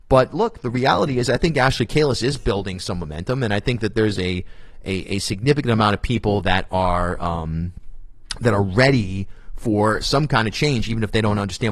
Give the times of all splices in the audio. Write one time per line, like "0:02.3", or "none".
none